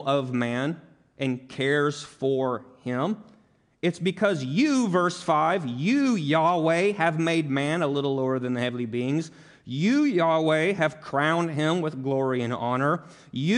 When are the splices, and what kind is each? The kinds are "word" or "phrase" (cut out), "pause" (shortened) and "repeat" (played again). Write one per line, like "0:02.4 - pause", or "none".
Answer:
none